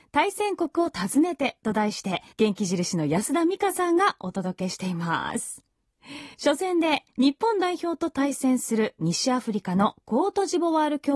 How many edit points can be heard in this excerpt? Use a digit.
2